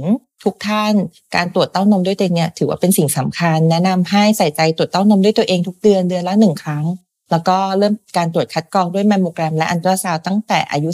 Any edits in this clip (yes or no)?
no